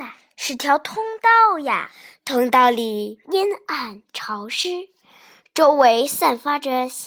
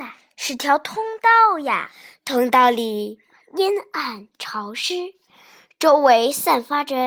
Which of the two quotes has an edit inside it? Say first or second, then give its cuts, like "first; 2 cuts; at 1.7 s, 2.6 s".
first; 1 cut; at 3.2 s